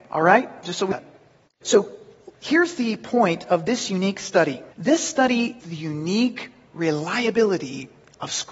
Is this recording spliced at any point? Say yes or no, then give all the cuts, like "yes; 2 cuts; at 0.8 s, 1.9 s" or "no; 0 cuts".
yes; 3 cuts; at 0.9 s, 4.7 s, 5.6 s